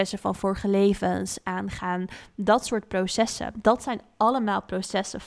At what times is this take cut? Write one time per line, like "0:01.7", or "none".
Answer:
none